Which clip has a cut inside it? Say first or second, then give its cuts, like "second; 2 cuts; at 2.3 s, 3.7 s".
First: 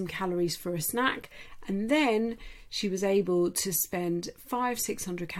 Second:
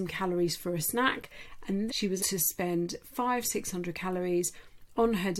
second; 2 cuts; at 1.9 s, 2.2 s